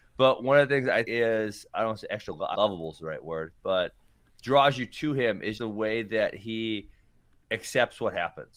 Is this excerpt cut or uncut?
cut